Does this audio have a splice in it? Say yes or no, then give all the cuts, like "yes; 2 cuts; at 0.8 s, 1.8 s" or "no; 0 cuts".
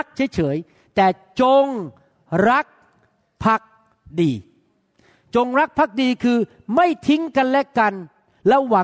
no; 0 cuts